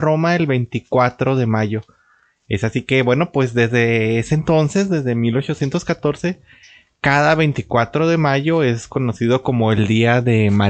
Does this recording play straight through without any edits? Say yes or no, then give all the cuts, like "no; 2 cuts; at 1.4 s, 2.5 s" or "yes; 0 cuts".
yes; 0 cuts